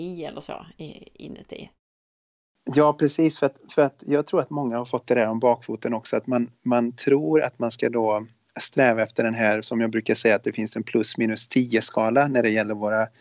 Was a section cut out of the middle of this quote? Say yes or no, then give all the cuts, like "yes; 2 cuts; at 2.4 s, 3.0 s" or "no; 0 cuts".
no; 0 cuts